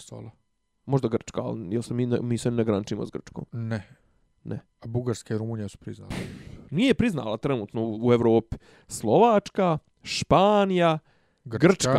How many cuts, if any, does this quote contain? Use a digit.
0